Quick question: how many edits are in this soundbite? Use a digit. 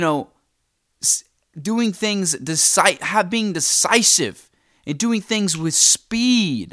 0